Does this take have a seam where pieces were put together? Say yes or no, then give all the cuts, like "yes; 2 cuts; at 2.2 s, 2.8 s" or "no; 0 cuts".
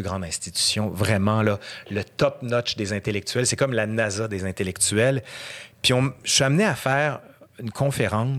no; 0 cuts